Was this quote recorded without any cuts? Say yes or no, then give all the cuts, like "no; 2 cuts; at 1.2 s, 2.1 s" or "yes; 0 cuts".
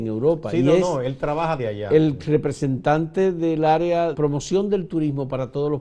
no; 2 cuts; at 1.6 s, 4.1 s